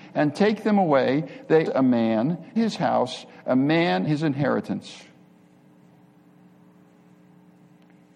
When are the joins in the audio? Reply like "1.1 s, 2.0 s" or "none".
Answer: 1.7 s, 2.6 s, 4.1 s